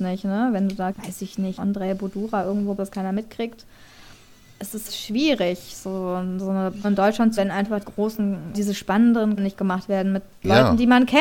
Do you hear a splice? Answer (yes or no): yes